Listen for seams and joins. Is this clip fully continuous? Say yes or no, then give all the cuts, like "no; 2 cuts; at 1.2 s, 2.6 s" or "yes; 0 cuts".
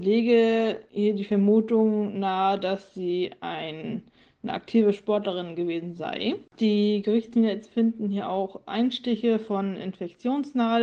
yes; 0 cuts